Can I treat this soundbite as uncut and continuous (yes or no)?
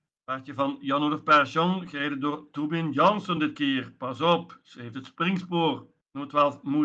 yes